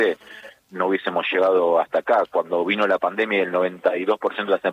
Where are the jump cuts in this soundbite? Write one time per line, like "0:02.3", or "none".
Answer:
none